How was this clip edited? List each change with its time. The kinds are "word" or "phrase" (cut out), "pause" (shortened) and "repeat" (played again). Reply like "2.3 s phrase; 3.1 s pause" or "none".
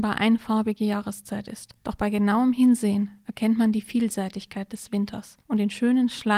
1.8 s pause; 5.4 s pause